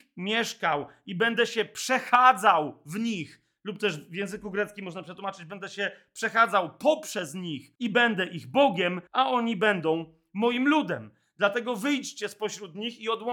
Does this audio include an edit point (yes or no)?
yes